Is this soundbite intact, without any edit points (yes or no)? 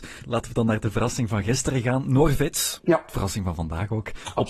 yes